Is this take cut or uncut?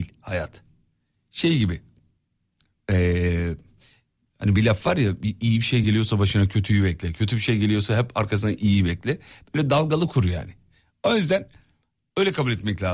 uncut